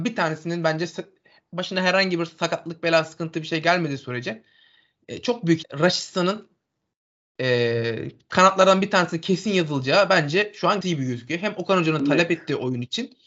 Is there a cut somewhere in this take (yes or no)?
yes